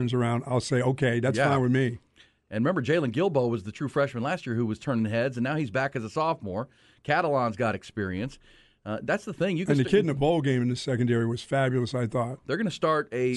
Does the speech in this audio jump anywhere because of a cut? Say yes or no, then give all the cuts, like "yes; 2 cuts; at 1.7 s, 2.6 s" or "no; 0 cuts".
no; 0 cuts